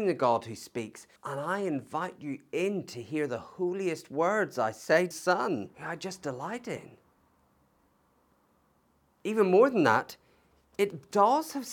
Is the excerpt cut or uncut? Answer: cut